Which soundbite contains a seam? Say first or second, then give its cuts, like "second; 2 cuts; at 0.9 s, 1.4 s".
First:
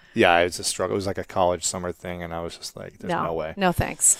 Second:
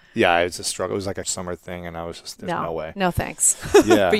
second; 2 cuts; at 1.2 s, 2.4 s